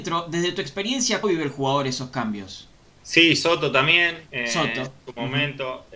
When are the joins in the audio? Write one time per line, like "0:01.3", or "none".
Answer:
0:01.2
0:02.8
0:04.3